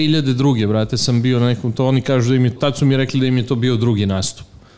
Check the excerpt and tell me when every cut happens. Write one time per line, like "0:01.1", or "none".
0:02.6